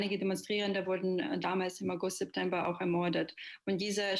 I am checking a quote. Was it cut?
no; 0 cuts

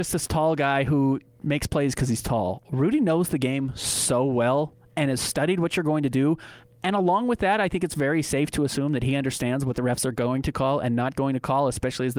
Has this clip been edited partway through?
no; 0 cuts

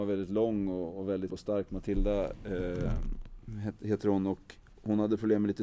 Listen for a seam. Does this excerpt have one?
yes; 1 cut; at 1.3 s

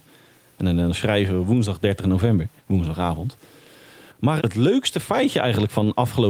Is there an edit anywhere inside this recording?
yes; 2 cuts; at 2.6 s, 4.4 s

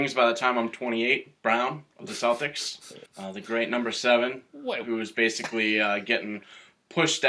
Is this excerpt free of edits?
no; 2 cuts; at 1.4 s, 3.1 s

